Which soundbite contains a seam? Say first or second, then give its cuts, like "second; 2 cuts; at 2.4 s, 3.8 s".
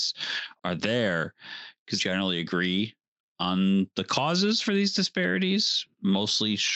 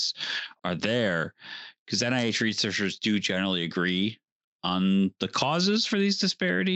first; 1 cut; at 2.0 s